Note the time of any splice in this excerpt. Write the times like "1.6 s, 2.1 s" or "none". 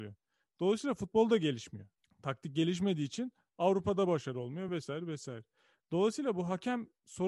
none